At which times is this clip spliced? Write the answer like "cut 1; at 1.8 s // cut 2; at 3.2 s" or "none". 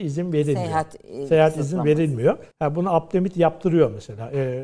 cut 1; at 2.5 s